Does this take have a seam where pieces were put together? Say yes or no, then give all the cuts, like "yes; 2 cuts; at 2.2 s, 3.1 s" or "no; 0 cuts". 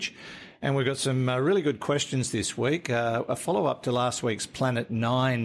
no; 0 cuts